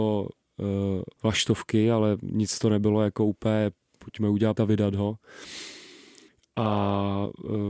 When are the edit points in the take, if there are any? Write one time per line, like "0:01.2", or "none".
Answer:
0:01.1
0:04.6